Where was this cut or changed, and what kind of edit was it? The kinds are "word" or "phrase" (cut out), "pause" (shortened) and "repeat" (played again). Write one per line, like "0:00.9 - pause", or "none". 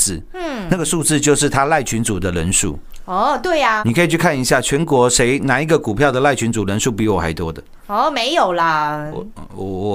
0:03.8 - word

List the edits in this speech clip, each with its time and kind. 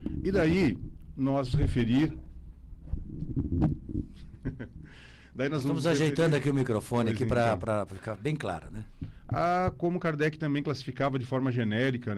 0:01.5 - word

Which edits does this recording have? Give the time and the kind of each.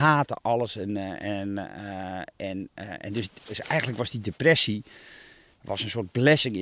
none

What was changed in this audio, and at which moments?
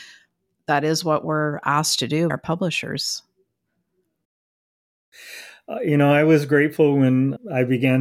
0:02.3 - word

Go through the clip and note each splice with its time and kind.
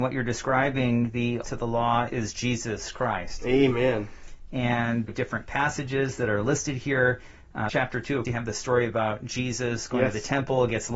0:01.4 - phrase
0:02.1 - word
0:05.1 - phrase
0:07.7 - word
0:08.2 - word

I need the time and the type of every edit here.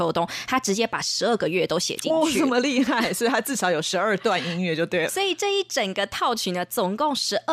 0:05.1 - word

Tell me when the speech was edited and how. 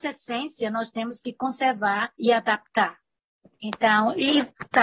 0:02.1 - pause

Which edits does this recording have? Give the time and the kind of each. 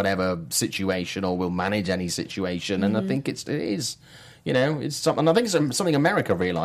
0:03.4 - word

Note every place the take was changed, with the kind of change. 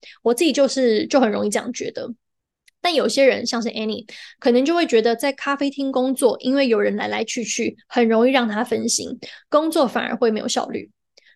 none

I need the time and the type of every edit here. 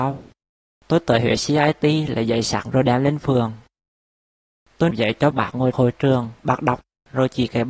0:02.6 - word
0:04.9 - word
0:05.3 - word
0:05.7 - word
0:06.4 - pause

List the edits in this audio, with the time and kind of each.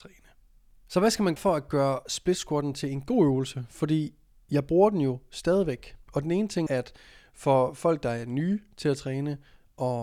0:01.4 - word
0:06.7 - word

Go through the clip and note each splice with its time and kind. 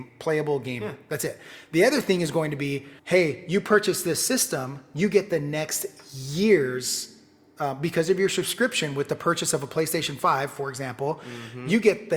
0:03.0 - pause

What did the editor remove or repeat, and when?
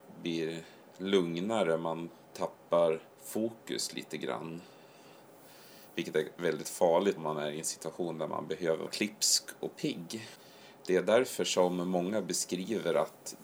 0:03.1 - pause
0:07.2 - word
0:08.9 - word

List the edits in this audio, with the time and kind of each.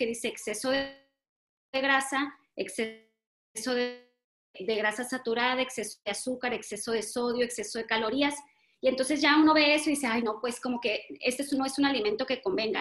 none

